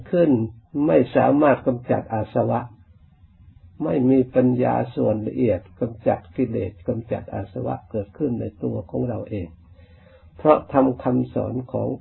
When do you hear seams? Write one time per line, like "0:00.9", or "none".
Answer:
none